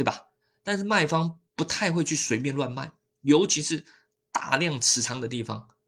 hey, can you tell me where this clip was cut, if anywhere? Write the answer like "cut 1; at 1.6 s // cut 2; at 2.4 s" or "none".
cut 1; at 1.5 s